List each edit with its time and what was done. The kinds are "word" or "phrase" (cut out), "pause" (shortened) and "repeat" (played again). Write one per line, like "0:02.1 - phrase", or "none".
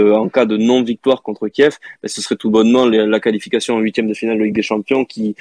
none